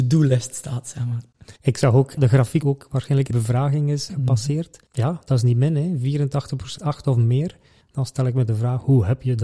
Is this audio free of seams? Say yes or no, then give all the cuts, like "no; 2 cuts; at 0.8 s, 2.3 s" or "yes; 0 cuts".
no; 6 cuts; at 1.6 s, 2.2 s, 2.6 s, 3.3 s, 4.8 s, 6.8 s